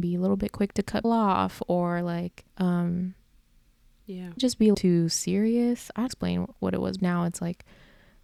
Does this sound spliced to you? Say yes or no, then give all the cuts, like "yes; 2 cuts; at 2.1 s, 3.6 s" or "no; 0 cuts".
yes; 6 cuts; at 1.0 s, 2.5 s, 4.4 s, 4.7 s, 6.1 s, 7.0 s